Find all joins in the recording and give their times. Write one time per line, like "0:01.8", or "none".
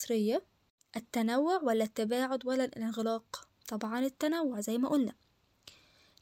0:03.6